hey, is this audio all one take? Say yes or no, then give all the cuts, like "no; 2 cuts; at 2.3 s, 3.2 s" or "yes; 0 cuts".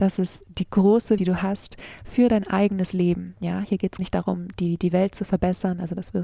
no; 2 cuts; at 1.2 s, 4.0 s